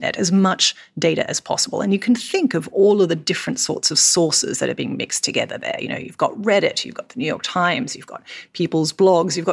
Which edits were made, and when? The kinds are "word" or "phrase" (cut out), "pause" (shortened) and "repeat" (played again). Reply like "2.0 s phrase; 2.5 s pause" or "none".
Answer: none